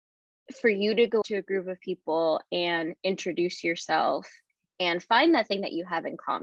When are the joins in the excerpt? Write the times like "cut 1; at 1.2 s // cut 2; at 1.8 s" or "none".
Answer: cut 1; at 1.2 s

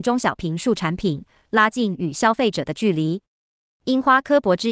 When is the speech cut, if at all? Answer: none

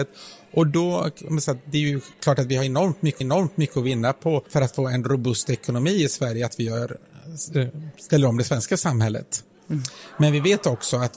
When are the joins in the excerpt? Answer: cut 1; at 2.1 s // cut 2; at 3.2 s // cut 3; at 4.5 s

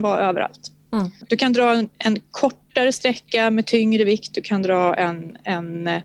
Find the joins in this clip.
none

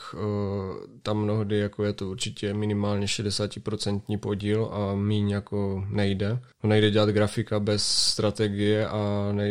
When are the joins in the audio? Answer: cut 1; at 6.5 s

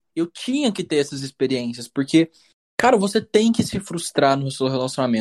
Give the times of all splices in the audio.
none

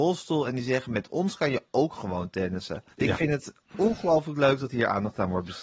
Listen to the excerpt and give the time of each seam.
cut 1; at 2.9 s

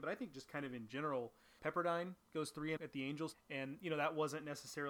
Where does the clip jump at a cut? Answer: cut 1; at 1.6 s // cut 2; at 2.8 s // cut 3; at 3.3 s

